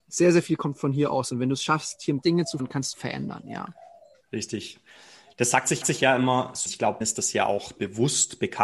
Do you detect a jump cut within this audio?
yes; 6 cuts; at 2.2 s, 2.6 s, 2.9 s, 5.8 s, 6.7 s, 7.0 s

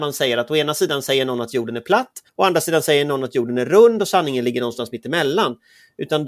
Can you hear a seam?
yes; 1 cut; at 2.3 s

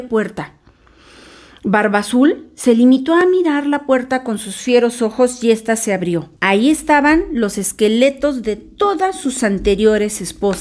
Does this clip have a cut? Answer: yes; 1 cut; at 6.4 s

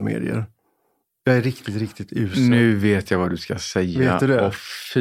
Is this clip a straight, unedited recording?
yes; 0 cuts

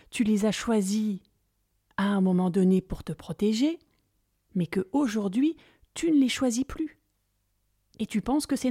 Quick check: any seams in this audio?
no; 0 cuts

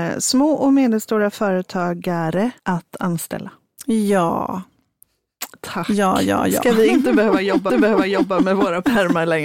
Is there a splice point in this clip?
yes; 2 cuts; at 2.6 s, 7.7 s

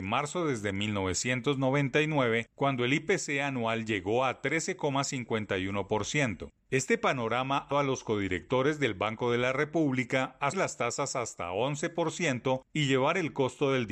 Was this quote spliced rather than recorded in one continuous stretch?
yes; 2 cuts; at 7.7 s, 10.5 s

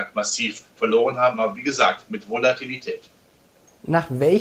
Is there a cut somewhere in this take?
no; 0 cuts

